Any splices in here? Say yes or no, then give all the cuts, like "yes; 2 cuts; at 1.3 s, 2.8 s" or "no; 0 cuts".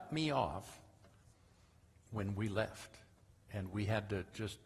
yes; 1 cut; at 2.1 s